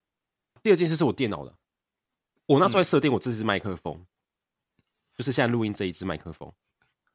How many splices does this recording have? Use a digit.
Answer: 0